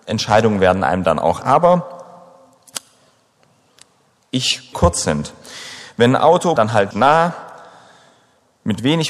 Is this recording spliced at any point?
yes; 4 cuts; at 1.4 s, 4.7 s, 6.6 s, 6.9 s

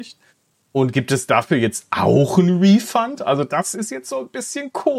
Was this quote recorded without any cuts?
yes; 0 cuts

